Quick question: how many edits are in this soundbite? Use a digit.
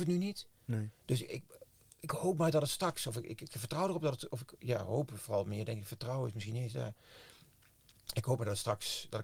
0